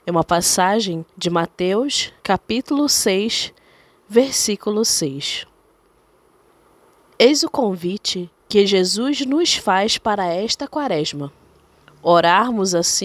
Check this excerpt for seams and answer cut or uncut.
cut